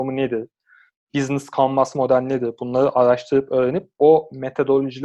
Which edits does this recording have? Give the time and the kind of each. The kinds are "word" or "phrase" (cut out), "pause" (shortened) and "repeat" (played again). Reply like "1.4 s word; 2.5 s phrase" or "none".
none